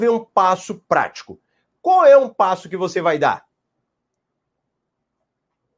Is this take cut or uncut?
uncut